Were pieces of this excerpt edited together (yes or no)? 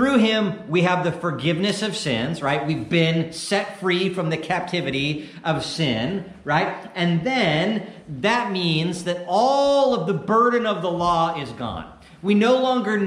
no